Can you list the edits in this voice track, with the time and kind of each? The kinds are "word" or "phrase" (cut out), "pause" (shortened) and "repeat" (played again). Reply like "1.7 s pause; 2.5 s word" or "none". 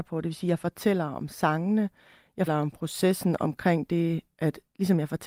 2.5 s word